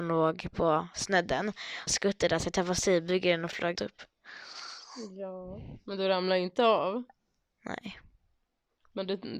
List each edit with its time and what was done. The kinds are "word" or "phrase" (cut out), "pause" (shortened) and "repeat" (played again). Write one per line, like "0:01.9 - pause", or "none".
0:01.9 - phrase
0:03.7 - word